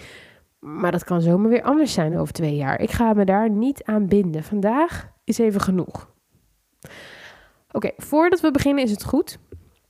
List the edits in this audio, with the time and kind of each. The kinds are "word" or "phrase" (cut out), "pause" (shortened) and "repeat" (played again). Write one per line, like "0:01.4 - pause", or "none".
none